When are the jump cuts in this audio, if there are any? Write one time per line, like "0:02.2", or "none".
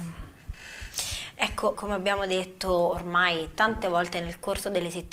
0:01.7